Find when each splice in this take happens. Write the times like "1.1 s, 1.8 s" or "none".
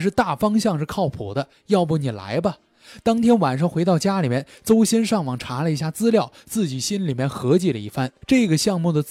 8.2 s